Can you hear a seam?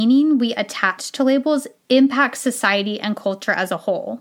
no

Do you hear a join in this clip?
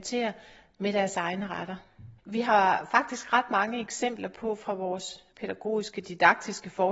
yes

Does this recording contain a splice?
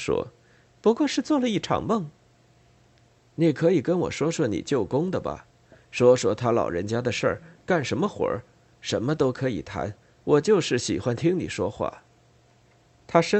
no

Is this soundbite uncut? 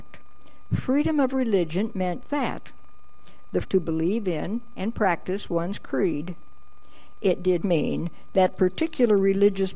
no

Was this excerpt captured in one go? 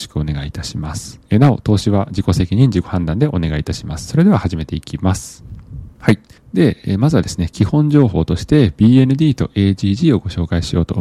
no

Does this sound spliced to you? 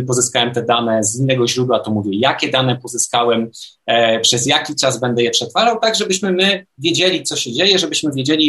no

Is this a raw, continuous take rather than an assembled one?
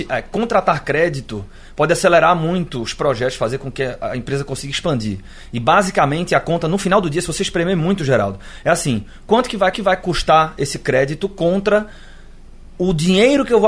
no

